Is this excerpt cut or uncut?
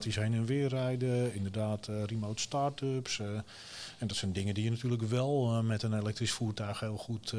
uncut